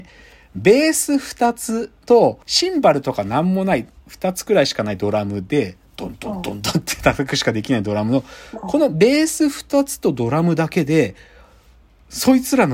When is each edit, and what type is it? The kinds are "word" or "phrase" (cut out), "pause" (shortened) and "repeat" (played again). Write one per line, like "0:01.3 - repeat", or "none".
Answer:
0:02.4 - pause